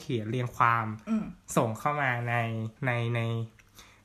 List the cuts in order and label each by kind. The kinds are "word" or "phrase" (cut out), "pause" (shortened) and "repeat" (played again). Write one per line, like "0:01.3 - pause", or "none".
0:02.8 - pause